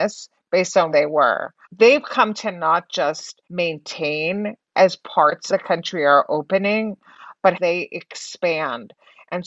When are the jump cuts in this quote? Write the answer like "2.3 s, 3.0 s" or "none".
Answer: 0.9 s, 1.6 s, 2.3 s, 3.4 s, 5.5 s, 7.5 s